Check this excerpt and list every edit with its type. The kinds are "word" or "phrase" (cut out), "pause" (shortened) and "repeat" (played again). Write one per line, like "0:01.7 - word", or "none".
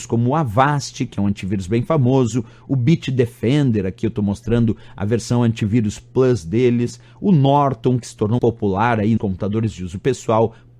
0:08.4 - word
0:09.2 - word